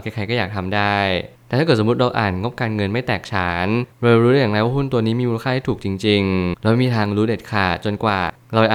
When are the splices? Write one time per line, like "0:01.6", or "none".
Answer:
0:06.5